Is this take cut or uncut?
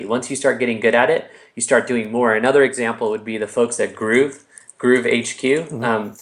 uncut